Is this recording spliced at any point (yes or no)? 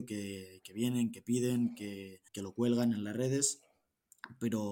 yes